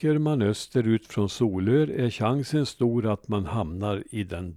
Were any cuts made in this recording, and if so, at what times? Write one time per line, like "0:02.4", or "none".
none